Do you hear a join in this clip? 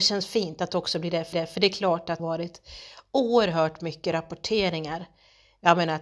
yes; 2 cuts; at 1.3 s, 2.2 s

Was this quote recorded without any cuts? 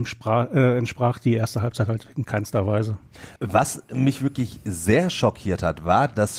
no; 1 cut; at 3.4 s

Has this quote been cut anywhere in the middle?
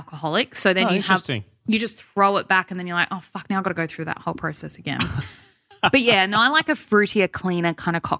no; 0 cuts

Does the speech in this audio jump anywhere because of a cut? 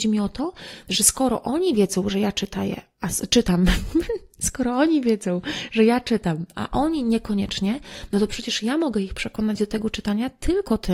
no; 0 cuts

